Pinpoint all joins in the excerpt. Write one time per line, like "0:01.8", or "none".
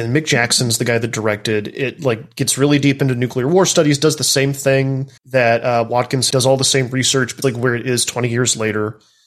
0:05.2
0:06.3
0:07.4